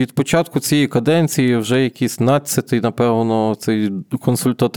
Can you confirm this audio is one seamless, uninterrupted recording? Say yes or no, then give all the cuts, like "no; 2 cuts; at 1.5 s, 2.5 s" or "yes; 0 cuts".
yes; 0 cuts